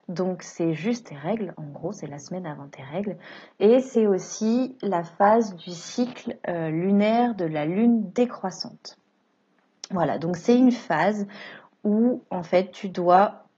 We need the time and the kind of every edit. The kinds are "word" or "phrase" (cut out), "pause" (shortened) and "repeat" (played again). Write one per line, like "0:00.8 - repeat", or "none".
0:01.0 - word